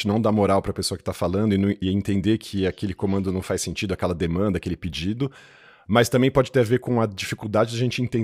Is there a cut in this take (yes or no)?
no